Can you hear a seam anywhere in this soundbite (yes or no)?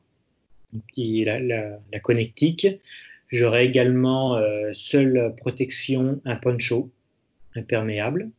no